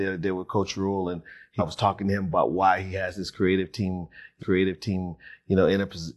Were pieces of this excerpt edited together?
yes; 2 cuts; at 1.6 s, 4.4 s

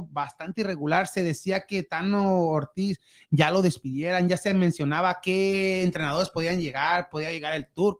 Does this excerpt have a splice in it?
no; 0 cuts

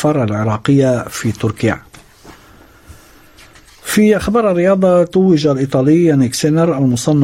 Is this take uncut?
yes; 0 cuts

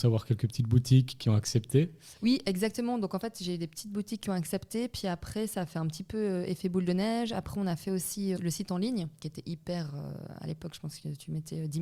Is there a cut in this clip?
yes; 3 cuts; at 2.2 s, 8.4 s, 9.2 s

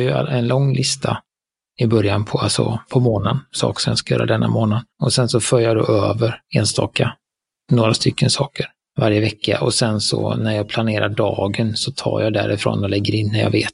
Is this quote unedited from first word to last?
no; 2 cuts; at 4.9 s, 6.4 s

